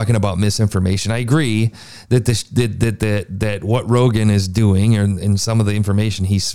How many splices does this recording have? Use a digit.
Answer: 0